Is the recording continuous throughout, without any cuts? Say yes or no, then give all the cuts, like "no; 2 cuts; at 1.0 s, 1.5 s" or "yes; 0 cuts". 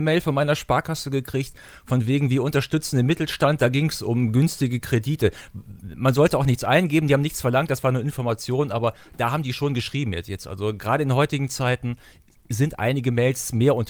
yes; 0 cuts